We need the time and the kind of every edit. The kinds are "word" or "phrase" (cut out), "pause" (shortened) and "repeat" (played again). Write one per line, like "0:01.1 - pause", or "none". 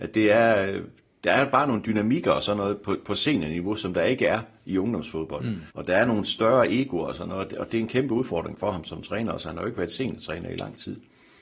0:05.7 - pause